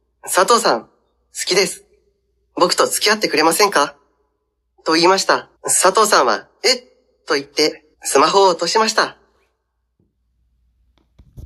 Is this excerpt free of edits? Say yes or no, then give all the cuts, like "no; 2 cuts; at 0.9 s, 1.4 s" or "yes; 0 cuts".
no; 2 cuts; at 5.6 s, 7.9 s